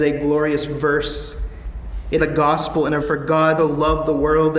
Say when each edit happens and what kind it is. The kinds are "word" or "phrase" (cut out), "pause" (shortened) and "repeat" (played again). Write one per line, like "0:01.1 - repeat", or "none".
0:02.2 - word
0:03.0 - word
0:03.6 - word